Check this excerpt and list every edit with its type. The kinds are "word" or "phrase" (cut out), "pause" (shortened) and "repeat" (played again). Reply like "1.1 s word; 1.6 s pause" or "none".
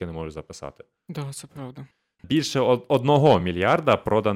none